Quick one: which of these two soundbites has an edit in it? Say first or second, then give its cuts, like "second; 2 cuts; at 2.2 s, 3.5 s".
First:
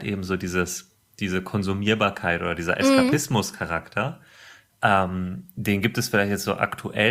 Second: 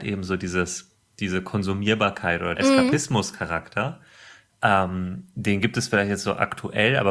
second; 1 cut; at 2.5 s